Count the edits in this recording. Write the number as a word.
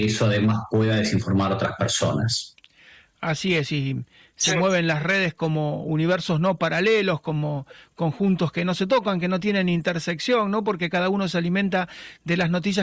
zero